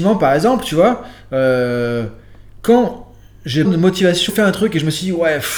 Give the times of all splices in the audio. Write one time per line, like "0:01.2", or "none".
0:03.6
0:04.3